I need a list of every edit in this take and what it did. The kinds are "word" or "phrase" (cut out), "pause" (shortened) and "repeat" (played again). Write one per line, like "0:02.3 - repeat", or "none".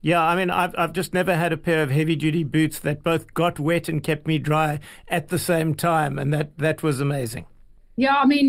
none